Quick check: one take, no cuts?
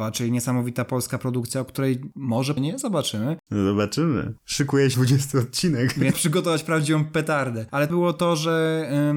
no; 4 cuts; at 2.6 s, 4.9 s, 6.1 s, 7.9 s

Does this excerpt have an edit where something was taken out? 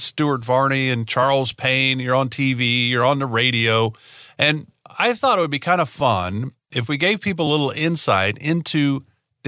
no; 0 cuts

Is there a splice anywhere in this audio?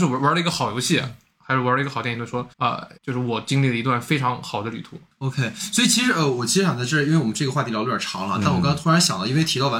yes; 2 cuts; at 2.5 s, 3.0 s

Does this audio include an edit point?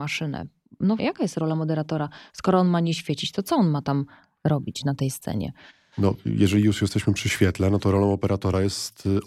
yes; 1 cut; at 1.0 s

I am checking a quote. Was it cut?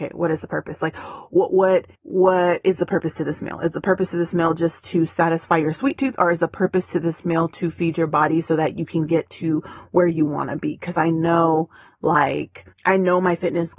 yes; 2 cuts; at 1.9 s, 12.7 s

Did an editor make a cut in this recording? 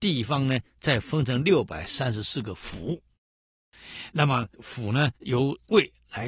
yes; 2 cuts; at 4.5 s, 5.2 s

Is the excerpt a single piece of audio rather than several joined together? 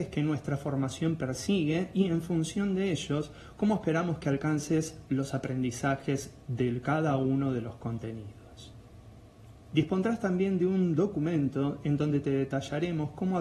no; 1 cut; at 9.6 s

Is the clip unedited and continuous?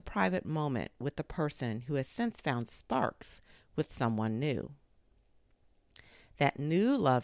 yes; 0 cuts

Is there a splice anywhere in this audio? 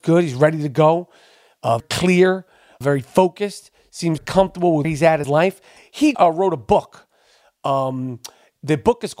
yes; 6 cuts; at 1.8 s, 2.8 s, 4.2 s, 4.8 s, 5.2 s, 6.1 s

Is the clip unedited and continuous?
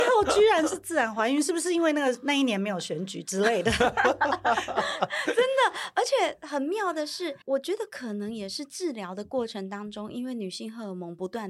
no; 1 cut; at 7.4 s

